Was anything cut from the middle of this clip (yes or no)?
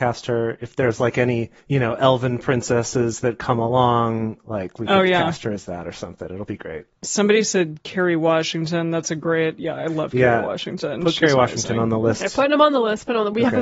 yes